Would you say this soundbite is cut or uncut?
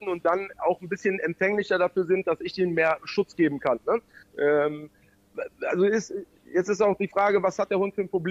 uncut